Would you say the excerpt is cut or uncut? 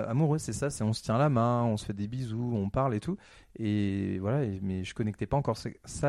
uncut